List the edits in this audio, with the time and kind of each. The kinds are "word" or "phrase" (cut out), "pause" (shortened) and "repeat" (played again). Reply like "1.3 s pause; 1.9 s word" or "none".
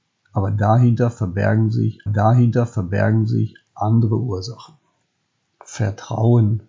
2.1 s repeat; 5.3 s pause